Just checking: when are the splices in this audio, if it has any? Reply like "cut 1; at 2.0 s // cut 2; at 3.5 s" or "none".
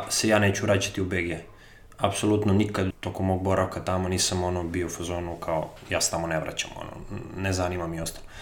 cut 1; at 2.9 s